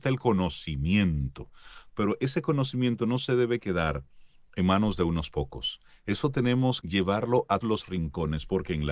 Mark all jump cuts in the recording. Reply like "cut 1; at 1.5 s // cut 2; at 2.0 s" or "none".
cut 1; at 6.8 s // cut 2; at 7.6 s